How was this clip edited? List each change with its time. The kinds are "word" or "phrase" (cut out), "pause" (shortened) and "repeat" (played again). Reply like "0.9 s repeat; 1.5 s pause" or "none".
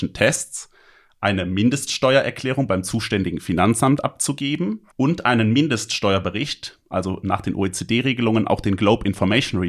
4.9 s pause